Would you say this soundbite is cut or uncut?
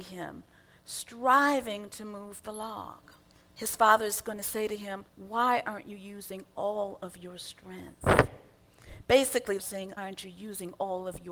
cut